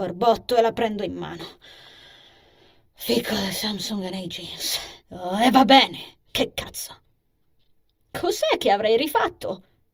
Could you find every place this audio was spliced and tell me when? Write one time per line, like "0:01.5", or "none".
0:05.0